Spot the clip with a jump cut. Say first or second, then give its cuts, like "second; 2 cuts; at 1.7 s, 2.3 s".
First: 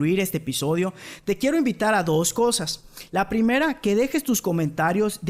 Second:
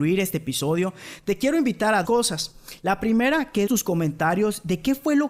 second; 2 cuts; at 2.0 s, 3.7 s